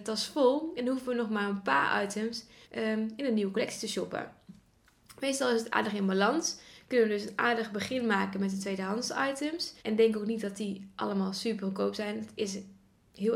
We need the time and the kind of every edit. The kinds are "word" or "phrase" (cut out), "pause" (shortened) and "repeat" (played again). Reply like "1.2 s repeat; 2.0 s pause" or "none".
2.6 s pause; 9.8 s pause